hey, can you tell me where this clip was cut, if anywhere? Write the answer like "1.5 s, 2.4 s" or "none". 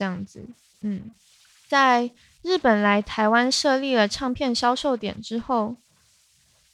none